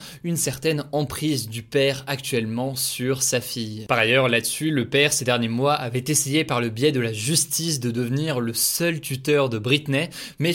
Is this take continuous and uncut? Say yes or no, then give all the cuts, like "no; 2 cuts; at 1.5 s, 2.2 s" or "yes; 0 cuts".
yes; 0 cuts